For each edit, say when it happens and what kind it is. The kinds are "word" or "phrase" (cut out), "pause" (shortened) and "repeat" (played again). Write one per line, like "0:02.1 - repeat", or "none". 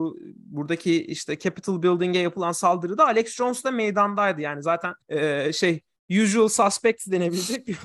0:05.0 - pause